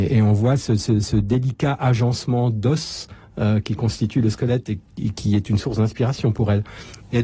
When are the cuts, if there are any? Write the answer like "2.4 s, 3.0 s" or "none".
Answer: none